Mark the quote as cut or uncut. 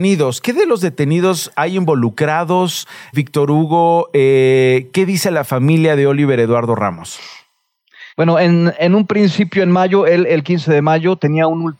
cut